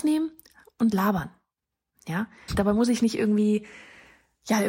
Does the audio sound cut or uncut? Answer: cut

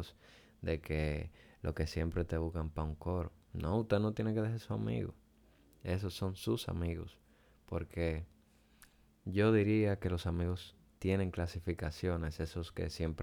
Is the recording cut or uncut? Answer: uncut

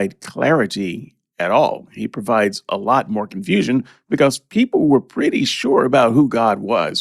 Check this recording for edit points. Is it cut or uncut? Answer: uncut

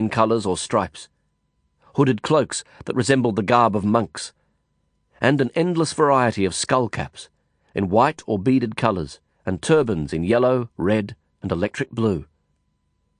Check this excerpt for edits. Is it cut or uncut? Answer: cut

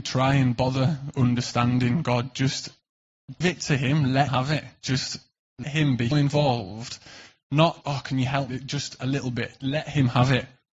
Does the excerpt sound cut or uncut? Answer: cut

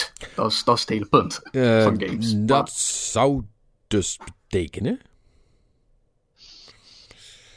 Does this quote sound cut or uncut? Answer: uncut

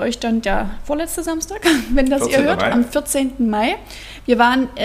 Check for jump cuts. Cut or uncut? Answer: uncut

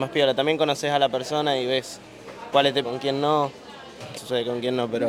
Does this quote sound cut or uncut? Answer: cut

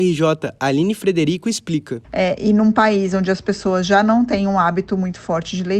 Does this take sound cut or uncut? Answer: uncut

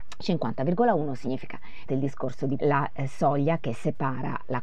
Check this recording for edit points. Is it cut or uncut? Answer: cut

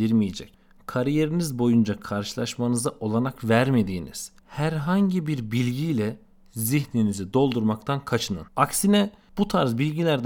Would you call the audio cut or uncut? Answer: cut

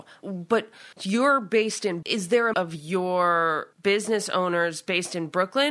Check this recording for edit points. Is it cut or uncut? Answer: cut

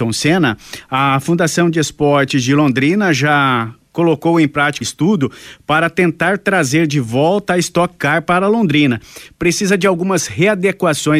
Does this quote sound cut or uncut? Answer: cut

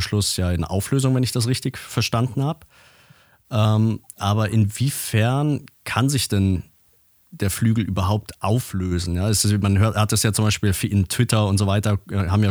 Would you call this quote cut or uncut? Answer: uncut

